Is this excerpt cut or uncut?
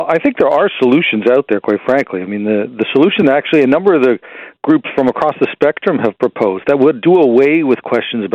uncut